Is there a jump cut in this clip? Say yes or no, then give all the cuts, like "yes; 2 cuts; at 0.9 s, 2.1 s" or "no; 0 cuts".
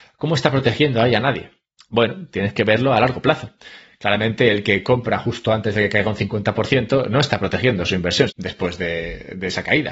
yes; 1 cut; at 8.3 s